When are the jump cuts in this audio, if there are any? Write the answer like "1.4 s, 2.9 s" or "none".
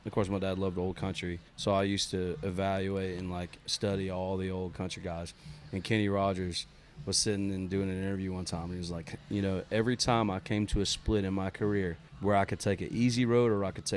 1.5 s, 12.1 s